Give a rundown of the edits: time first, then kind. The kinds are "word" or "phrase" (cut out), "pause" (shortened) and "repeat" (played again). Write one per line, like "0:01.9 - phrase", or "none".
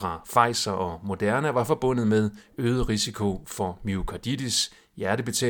none